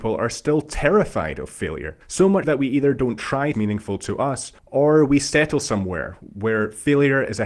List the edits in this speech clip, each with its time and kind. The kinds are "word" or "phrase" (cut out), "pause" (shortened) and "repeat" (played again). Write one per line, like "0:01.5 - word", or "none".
0:02.0 - pause
0:02.4 - word
0:03.5 - phrase
0:04.6 - pause

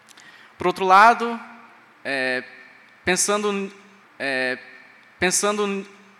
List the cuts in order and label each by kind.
0:04.0 - repeat

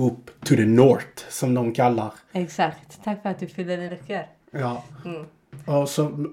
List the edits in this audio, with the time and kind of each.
0:03.9 - word

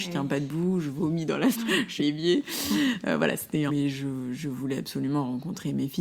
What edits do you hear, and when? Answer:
0:01.5 - word
0:02.0 - word
0:03.7 - phrase

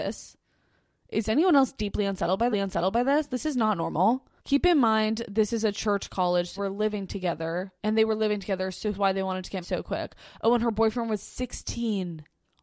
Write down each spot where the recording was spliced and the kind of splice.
0:02.5 - repeat
0:04.4 - pause
0:06.6 - word
0:07.8 - pause
0:08.9 - phrase
0:09.6 - word

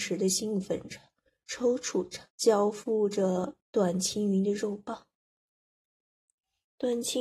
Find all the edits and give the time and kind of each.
0:02.3 - pause
0:03.6 - pause

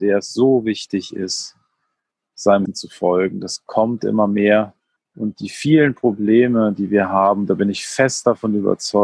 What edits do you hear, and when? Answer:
0:02.7 - word
0:05.0 - pause

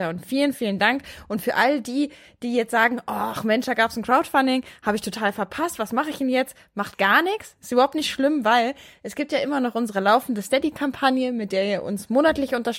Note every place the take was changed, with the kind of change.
none

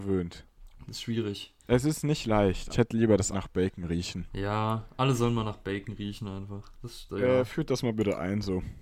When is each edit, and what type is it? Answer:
0:01.6 - pause
0:02.7 - phrase
0:03.3 - word

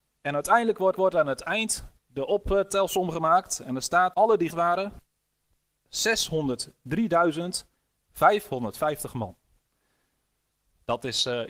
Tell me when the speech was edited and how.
0:00.9 - repeat
0:02.0 - pause
0:04.1 - word
0:04.5 - word

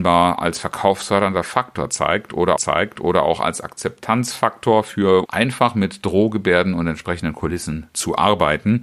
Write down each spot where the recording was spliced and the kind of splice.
0:02.6 - repeat
0:05.3 - phrase

